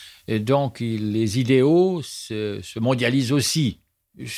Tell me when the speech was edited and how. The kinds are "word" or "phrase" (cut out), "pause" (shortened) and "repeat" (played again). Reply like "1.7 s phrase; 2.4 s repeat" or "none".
none